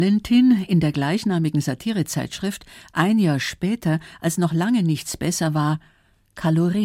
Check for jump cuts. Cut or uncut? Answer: uncut